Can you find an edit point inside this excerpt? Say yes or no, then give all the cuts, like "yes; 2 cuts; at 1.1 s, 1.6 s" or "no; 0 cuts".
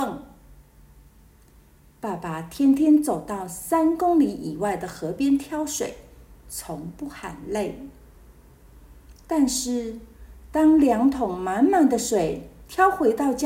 no; 0 cuts